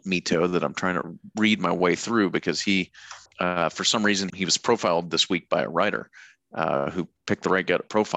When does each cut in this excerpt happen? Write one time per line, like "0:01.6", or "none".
0:03.3
0:04.3